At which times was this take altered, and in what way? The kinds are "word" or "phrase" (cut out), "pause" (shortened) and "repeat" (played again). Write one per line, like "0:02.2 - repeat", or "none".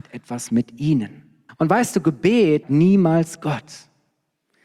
0:01.5 - pause
0:02.6 - word